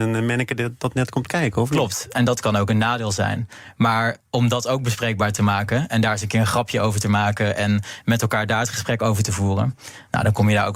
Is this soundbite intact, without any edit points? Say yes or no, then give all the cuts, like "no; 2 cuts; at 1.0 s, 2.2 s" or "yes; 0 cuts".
no; 1 cut; at 4.2 s